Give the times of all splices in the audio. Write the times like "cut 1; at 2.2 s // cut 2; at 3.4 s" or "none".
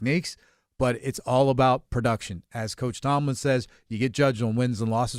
none